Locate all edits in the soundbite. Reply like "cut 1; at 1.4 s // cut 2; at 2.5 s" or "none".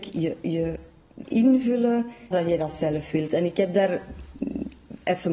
cut 1; at 1.2 s // cut 2; at 2.3 s